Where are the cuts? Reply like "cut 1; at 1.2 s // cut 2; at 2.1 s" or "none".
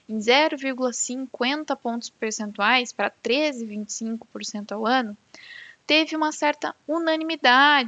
none